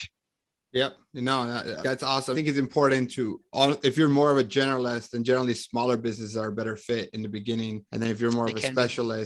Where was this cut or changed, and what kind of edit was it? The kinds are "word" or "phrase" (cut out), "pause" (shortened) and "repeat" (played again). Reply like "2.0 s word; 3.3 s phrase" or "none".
1.8 s word; 2.3 s phrase; 3.1 s word; 7.9 s pause